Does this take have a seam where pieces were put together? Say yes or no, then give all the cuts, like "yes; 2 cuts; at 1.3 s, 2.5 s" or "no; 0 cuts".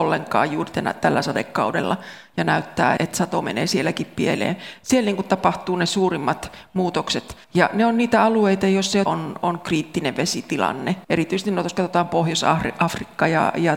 yes; 4 cuts; at 3.0 s, 7.4 s, 9.1 s, 11.0 s